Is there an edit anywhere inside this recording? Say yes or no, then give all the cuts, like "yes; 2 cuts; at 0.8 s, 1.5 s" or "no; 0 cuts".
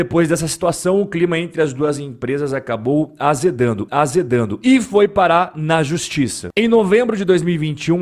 yes; 1 cut; at 3.9 s